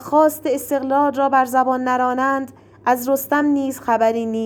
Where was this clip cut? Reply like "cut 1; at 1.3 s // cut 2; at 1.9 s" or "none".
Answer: none